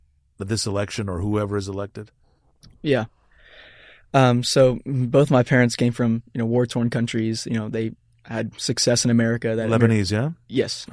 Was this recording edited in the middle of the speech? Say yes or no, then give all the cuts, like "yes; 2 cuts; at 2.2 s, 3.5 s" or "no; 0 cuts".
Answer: no; 0 cuts